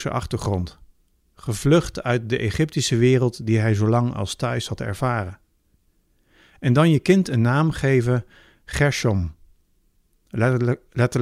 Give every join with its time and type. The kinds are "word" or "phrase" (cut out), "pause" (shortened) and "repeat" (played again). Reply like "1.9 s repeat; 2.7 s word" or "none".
none